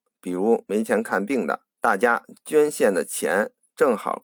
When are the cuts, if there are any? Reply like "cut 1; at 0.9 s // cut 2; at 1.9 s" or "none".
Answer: cut 1; at 1.7 s